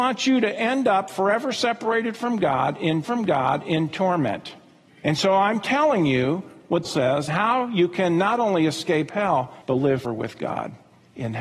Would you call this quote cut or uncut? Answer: cut